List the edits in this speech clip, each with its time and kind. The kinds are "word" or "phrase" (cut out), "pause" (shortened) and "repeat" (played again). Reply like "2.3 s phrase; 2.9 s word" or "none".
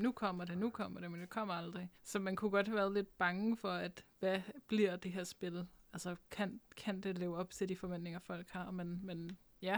2.0 s pause